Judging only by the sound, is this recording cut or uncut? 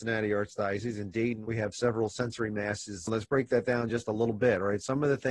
uncut